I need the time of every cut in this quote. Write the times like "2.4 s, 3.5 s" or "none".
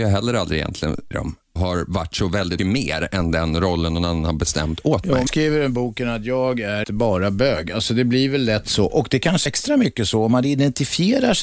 1.1 s, 1.6 s, 2.6 s, 5.3 s, 6.8 s, 9.5 s